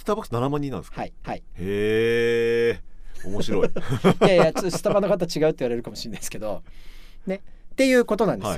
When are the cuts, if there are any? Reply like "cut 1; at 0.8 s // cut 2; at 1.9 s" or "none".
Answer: cut 1; at 1.2 s

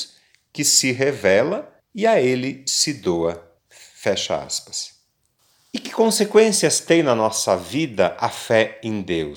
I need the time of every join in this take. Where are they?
cut 1; at 1.8 s // cut 2; at 3.6 s // cut 3; at 5.4 s

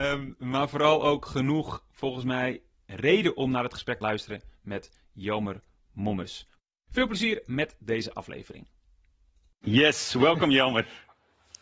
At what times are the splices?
cut 1; at 2.8 s // cut 2; at 4.0 s

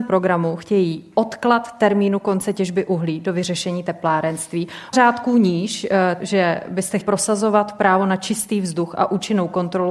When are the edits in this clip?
cut 1; at 4.9 s // cut 2; at 6.2 s // cut 3; at 7.0 s

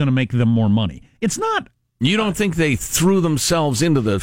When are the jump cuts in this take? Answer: none

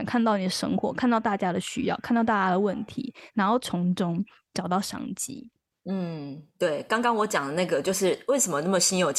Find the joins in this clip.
none

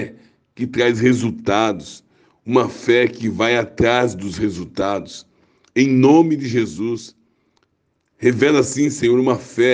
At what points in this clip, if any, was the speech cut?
none

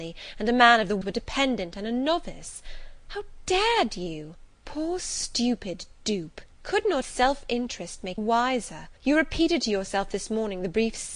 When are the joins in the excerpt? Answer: cut 1; at 1.0 s // cut 2; at 4.5 s // cut 3; at 6.5 s // cut 4; at 7.0 s // cut 5; at 8.2 s // cut 6; at 9.0 s

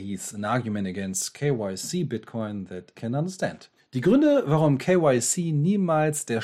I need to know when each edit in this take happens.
cut 1; at 3.0 s // cut 2; at 3.8 s

